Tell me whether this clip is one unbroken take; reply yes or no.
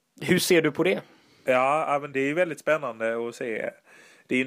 no